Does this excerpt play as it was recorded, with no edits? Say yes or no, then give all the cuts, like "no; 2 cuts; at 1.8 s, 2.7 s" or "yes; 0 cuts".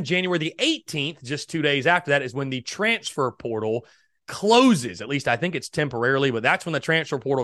yes; 0 cuts